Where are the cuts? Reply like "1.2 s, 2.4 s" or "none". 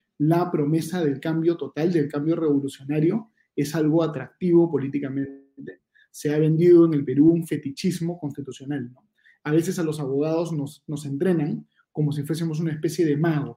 none